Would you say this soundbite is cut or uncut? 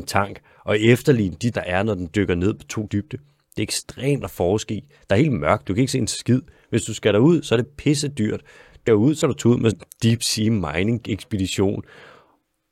cut